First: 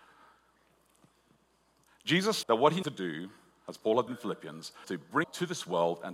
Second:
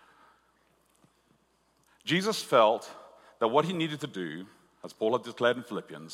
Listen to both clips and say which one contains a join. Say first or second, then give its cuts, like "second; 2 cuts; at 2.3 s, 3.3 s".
first; 5 cuts; at 2.4 s, 2.8 s, 4.1 s, 4.8 s, 5.2 s